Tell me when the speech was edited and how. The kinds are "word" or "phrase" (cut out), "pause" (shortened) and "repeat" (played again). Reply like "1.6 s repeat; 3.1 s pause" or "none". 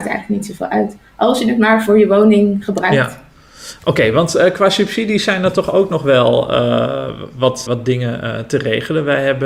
7.7 s word

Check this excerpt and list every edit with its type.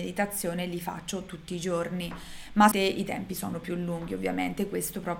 2.7 s word

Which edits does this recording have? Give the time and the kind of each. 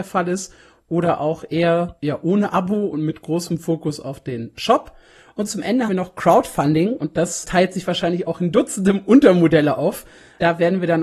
5.9 s word; 7.4 s word

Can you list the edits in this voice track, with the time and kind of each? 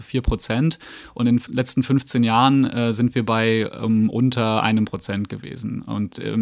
none

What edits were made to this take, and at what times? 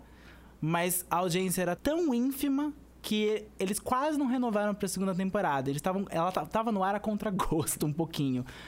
1.8 s word

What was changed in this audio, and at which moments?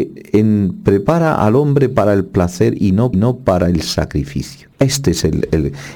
3.1 s repeat; 4.7 s pause

